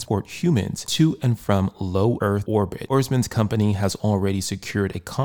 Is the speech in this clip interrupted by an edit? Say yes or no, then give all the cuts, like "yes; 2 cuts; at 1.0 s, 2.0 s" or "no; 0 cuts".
no; 0 cuts